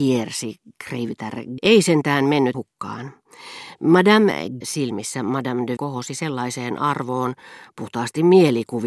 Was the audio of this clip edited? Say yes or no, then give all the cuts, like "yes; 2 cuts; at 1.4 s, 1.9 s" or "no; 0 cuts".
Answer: yes; 4 cuts; at 1.6 s, 2.5 s, 4.6 s, 5.8 s